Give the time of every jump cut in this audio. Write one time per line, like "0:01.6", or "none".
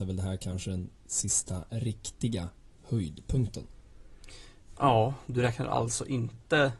0:02.7